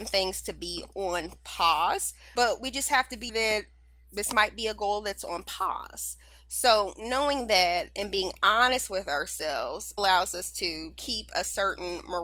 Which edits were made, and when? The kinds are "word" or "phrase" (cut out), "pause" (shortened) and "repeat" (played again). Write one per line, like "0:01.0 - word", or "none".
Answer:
0:03.3 - word
0:10.0 - word